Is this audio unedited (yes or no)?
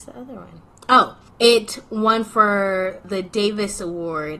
yes